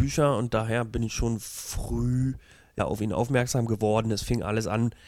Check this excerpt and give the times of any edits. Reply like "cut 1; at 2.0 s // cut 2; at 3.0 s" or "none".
none